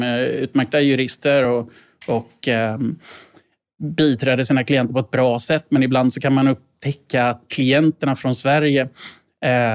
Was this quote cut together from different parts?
no; 0 cuts

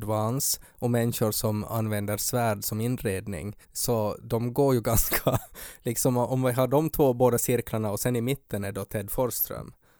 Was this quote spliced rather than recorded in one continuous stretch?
yes; 1 cut; at 3.6 s

